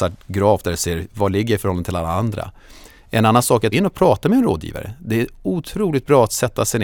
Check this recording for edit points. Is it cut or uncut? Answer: cut